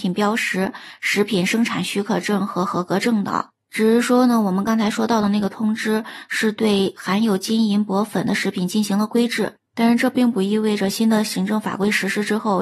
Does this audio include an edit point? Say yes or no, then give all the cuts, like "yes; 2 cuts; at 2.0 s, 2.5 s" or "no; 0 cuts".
yes; 1 cut; at 9.7 s